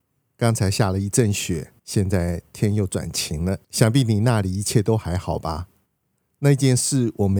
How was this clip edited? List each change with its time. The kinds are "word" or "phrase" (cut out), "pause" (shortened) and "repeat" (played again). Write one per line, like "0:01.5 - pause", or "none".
0:01.8 - pause
0:03.6 - pause